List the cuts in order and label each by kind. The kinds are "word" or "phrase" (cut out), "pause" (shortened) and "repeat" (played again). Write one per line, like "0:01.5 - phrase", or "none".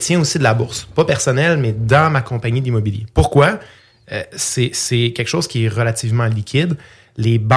none